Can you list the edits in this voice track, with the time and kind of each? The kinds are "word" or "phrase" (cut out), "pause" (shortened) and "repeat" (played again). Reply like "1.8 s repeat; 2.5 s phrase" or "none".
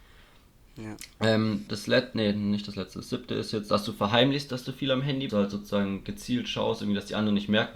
1.7 s word; 5.3 s phrase